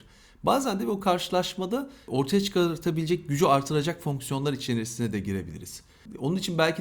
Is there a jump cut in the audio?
no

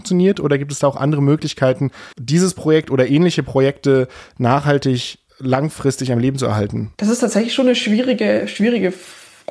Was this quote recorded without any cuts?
no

